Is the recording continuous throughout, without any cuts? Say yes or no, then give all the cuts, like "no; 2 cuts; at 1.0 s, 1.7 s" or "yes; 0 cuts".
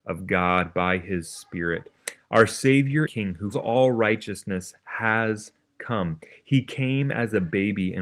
no; 2 cuts; at 3.1 s, 3.5 s